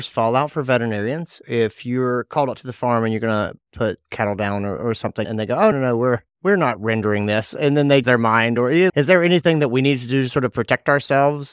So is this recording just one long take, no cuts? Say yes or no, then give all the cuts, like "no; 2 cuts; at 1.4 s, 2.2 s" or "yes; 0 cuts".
no; 4 cuts; at 5.2 s, 5.7 s, 8.0 s, 8.9 s